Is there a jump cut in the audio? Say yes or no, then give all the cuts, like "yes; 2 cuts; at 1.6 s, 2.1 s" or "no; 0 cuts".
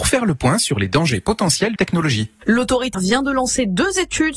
yes; 2 cuts; at 1.8 s, 2.9 s